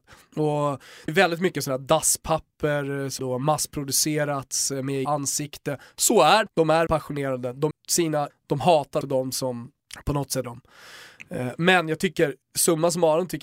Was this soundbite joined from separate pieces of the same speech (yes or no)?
yes